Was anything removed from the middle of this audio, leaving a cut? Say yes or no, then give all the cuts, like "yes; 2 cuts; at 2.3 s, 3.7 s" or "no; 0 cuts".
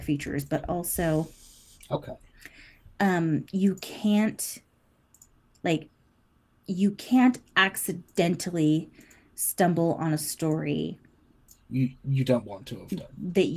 no; 0 cuts